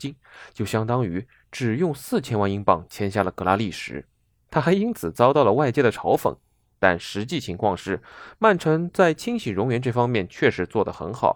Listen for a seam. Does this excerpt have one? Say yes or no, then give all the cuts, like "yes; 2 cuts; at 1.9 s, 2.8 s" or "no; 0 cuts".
no; 0 cuts